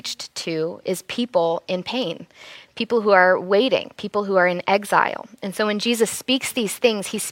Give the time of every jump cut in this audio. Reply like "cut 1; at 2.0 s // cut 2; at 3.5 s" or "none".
none